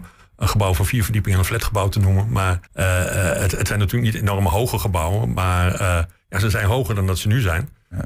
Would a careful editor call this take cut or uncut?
cut